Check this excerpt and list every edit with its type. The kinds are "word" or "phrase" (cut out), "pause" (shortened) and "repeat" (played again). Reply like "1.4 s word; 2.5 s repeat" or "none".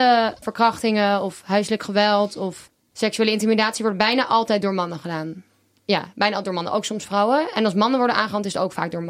none

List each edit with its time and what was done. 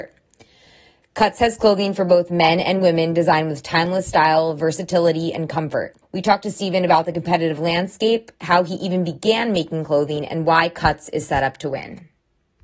6.0 s pause

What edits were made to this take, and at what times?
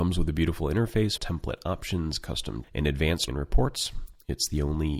1.2 s word; 2.6 s word; 3.3 s word

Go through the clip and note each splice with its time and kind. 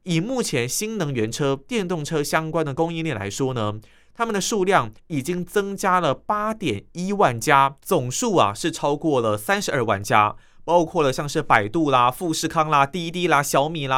7.8 s pause

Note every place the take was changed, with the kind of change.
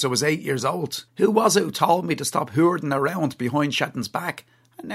1.1 s pause

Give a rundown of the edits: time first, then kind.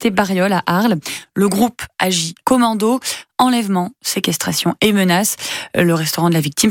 2.4 s word

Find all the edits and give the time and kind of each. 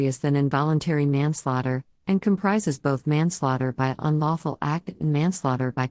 none

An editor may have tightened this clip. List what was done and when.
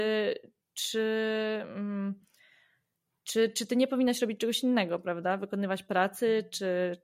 none

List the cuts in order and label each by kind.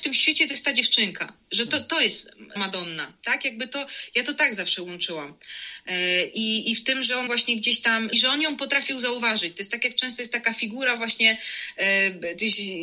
2.6 s word; 7.3 s word; 8.1 s word

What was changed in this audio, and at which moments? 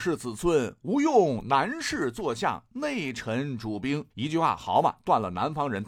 4.1 s pause

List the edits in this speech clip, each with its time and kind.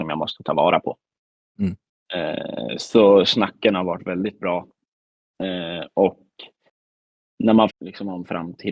7.7 s word

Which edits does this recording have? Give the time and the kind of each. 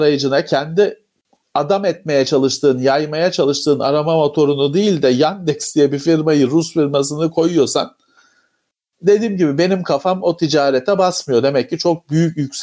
none

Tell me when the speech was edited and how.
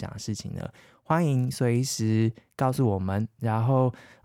none

